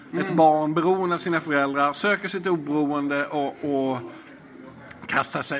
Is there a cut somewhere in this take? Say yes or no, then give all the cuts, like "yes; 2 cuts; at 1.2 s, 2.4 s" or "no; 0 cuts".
no; 0 cuts